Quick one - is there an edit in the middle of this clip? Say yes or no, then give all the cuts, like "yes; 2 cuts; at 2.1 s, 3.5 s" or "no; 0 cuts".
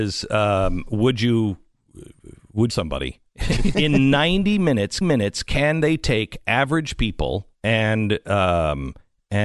yes; 4 cuts; at 2.7 s, 3.7 s, 5.0 s, 7.5 s